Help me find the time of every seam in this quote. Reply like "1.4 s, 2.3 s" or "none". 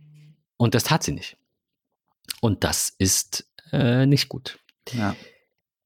none